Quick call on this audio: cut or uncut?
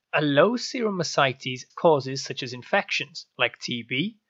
cut